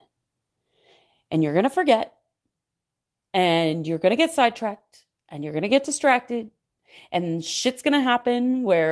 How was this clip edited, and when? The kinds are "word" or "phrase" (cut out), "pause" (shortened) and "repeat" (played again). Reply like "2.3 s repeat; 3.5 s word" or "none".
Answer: none